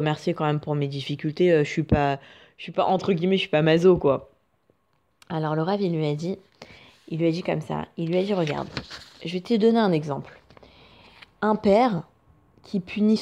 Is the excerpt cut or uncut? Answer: uncut